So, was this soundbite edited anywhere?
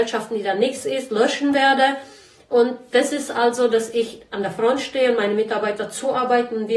no; 0 cuts

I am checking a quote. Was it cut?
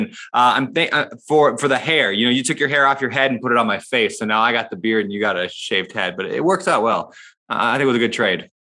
no; 0 cuts

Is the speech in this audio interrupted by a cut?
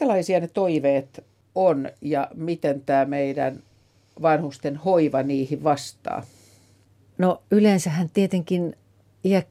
no; 0 cuts

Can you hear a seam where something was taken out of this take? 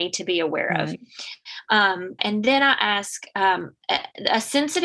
yes; 1 cut; at 2.2 s

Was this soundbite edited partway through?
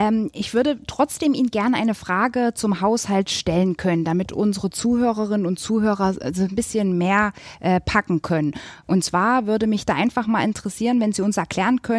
no; 0 cuts

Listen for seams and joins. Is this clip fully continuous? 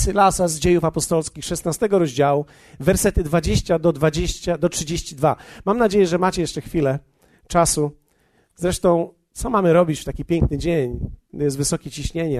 yes; 0 cuts

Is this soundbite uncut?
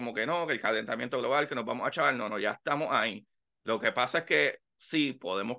yes; 0 cuts

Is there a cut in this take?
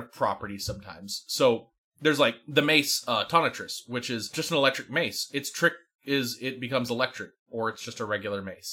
no; 0 cuts

